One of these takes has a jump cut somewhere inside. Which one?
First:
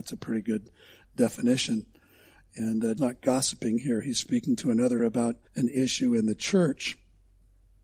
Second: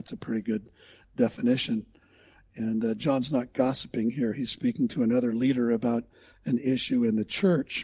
first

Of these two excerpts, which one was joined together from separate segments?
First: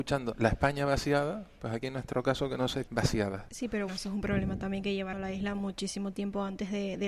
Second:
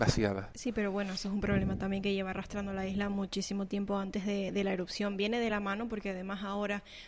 first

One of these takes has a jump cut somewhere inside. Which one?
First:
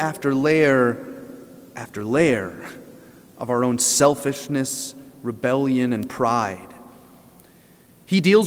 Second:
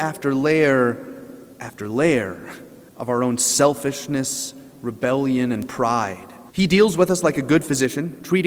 second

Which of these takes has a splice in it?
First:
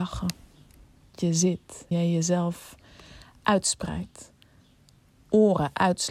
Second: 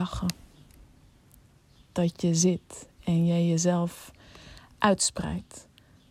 first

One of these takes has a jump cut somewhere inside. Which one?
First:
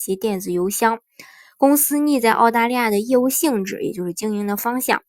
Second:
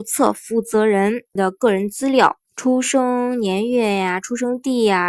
second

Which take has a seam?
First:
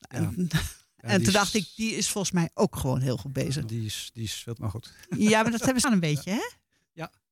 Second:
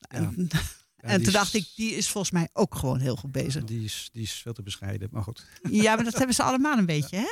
first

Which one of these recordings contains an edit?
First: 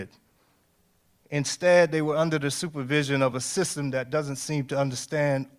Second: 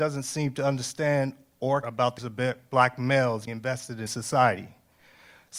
second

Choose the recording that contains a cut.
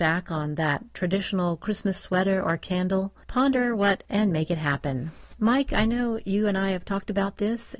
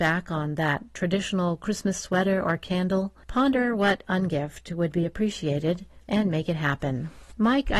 first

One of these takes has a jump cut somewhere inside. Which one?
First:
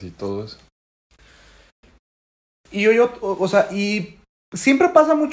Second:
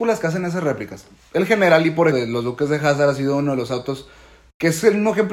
second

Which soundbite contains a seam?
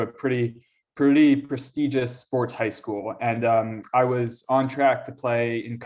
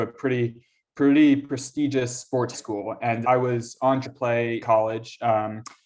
second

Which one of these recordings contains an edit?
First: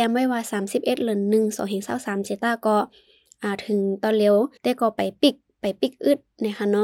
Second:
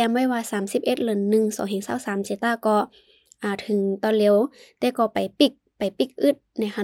first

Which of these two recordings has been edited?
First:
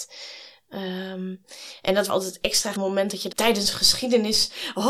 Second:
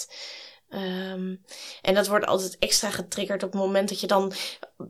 first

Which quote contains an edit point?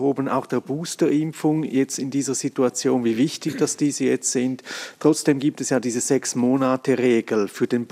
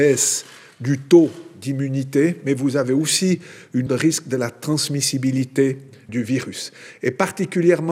second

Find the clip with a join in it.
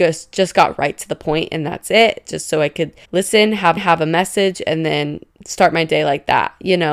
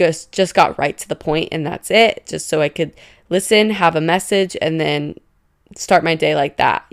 first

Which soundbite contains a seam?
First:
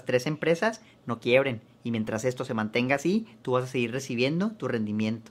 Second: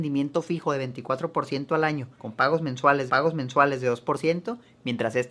second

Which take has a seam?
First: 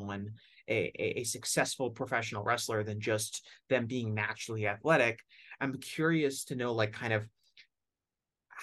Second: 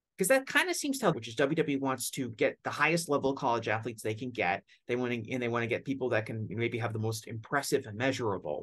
second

